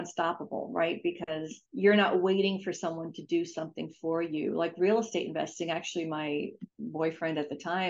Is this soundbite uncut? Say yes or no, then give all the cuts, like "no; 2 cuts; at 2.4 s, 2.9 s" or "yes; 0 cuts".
no; 2 cuts; at 1.7 s, 6.7 s